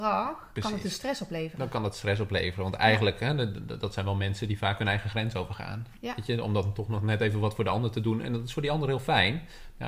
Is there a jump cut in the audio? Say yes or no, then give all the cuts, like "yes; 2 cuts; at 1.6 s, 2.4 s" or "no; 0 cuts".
no; 0 cuts